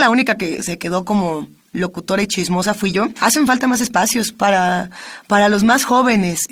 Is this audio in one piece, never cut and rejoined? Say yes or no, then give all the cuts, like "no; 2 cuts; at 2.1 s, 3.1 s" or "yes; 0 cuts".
yes; 0 cuts